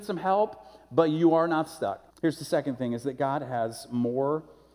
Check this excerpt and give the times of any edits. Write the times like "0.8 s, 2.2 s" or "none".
2.1 s